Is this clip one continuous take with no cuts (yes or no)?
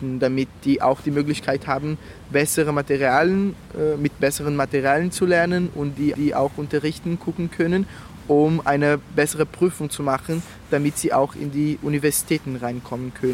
no